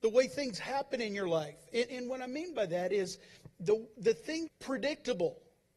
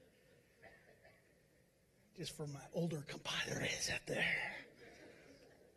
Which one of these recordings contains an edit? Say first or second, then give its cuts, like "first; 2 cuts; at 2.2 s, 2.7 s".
first; 1 cut; at 4.5 s